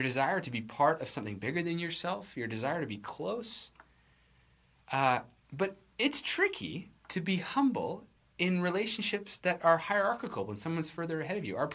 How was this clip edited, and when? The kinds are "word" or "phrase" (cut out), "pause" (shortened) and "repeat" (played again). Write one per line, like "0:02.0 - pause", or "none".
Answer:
0:08.2 - pause